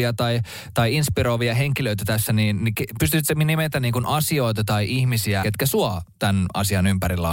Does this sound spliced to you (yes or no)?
yes